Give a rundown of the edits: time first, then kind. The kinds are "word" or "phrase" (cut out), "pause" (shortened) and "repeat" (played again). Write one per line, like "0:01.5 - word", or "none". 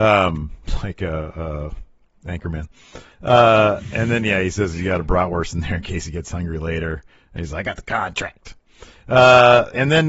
none